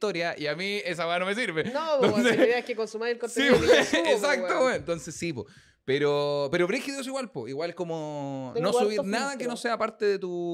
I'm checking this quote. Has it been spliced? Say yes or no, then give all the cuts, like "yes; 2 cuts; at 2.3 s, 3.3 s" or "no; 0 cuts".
no; 0 cuts